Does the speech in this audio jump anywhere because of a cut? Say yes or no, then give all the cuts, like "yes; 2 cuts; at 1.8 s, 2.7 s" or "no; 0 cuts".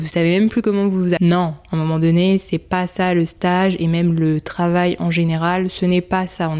yes; 1 cut; at 1.2 s